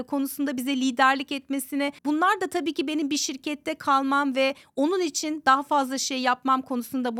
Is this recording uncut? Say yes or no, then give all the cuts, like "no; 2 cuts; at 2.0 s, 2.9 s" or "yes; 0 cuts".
no; 1 cut; at 2.0 s